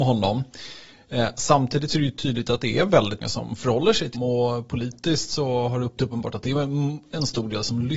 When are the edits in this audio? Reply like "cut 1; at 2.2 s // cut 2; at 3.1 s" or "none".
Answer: cut 1; at 3.2 s // cut 2; at 4.1 s // cut 3; at 6.0 s